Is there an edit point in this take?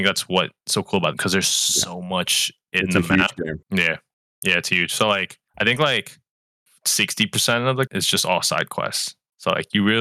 yes; 4 cuts; at 1.1 s, 3.6 s, 5.5 s, 7.9 s

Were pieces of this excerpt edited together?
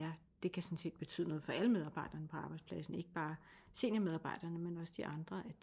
no; 0 cuts

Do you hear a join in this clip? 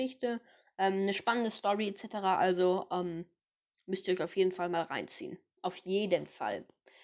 no; 0 cuts

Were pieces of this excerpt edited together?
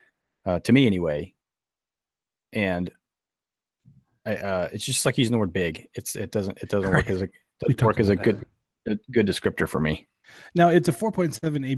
no; 0 cuts

